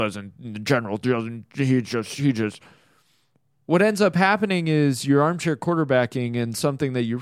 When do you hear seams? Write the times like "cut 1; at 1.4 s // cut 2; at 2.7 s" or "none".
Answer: none